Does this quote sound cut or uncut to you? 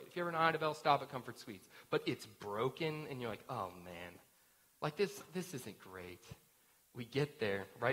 uncut